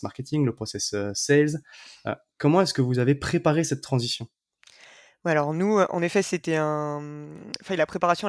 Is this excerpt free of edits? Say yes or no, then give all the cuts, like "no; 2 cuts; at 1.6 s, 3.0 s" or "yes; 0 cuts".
yes; 0 cuts